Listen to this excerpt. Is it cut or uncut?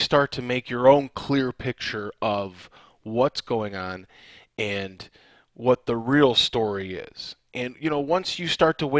uncut